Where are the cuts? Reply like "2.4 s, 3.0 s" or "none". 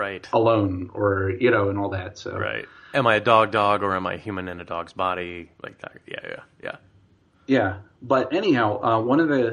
none